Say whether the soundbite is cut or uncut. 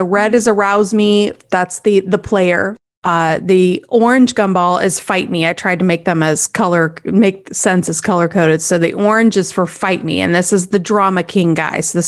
uncut